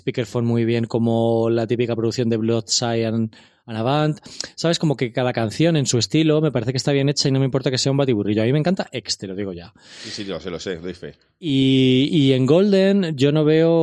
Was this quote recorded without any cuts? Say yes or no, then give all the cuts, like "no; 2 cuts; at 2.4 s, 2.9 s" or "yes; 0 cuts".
yes; 0 cuts